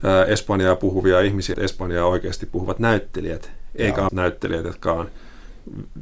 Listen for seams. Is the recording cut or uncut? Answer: cut